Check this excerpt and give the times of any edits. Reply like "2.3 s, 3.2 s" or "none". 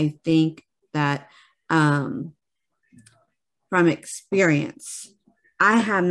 none